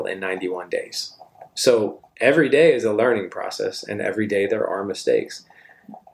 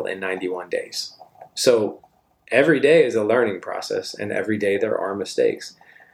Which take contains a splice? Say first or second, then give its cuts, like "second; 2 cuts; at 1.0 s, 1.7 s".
first; 1 cut; at 2.1 s